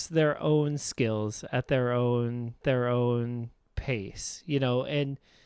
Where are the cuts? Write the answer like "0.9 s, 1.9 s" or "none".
2.6 s